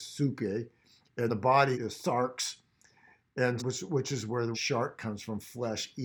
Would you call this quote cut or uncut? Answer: cut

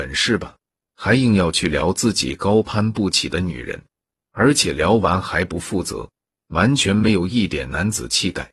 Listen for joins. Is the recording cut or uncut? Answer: uncut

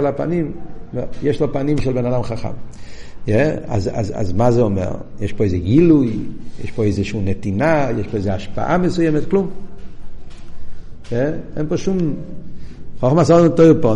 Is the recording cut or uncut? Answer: uncut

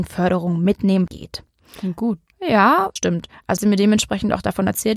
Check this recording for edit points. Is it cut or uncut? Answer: cut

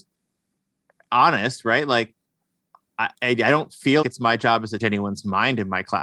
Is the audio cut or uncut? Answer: cut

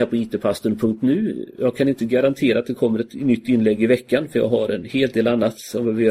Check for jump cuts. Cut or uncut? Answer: uncut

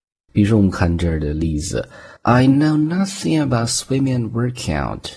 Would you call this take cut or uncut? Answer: cut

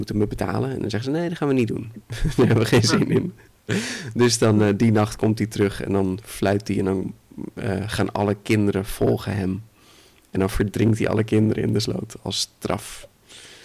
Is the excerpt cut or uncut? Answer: uncut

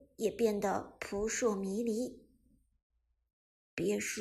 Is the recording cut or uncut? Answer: uncut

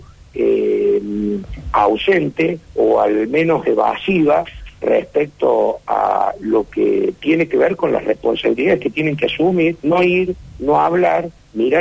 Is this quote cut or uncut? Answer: cut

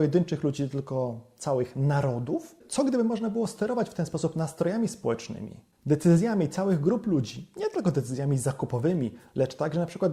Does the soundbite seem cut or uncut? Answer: uncut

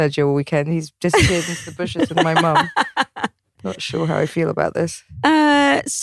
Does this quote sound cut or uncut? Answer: uncut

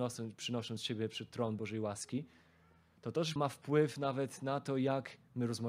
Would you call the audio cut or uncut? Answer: cut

